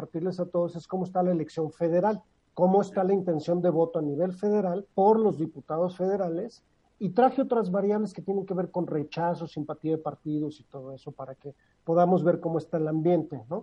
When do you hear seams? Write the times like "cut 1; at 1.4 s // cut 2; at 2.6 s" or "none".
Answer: cut 1; at 4.9 s